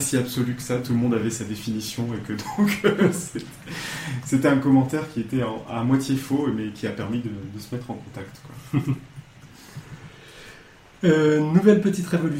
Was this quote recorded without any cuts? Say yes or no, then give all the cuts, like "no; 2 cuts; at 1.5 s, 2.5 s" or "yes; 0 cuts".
yes; 0 cuts